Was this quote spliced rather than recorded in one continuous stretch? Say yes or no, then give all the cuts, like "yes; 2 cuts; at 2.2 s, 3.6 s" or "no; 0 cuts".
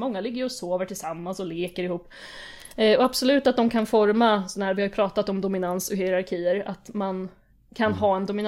no; 0 cuts